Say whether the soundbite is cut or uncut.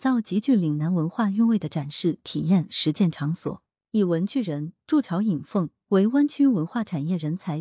uncut